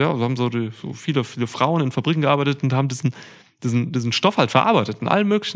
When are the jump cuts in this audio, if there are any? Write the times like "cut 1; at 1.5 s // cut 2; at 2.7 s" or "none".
none